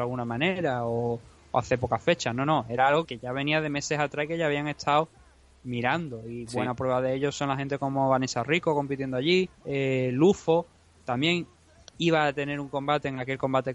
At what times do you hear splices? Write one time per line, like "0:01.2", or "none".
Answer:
0:03.0
0:09.5

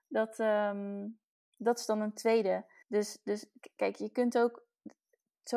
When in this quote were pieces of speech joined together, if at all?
0:01.3
0:02.8

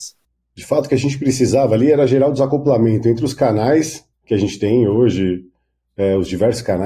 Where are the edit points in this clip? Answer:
0:04.1

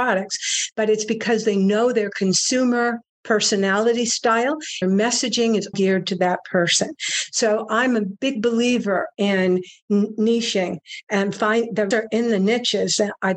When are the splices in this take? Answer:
0:04.8
0:05.7
0:11.9

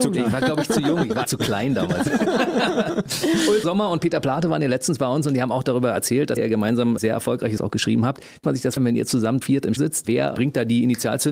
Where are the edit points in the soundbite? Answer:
0:01.2
0:03.6
0:06.4
0:07.0
0:07.6
0:08.4
0:08.8
0:09.4
0:09.8

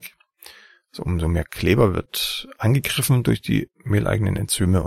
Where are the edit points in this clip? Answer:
none

